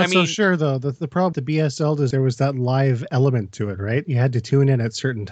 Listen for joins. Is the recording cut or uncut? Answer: cut